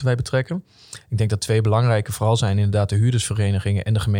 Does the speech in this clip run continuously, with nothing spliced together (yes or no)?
yes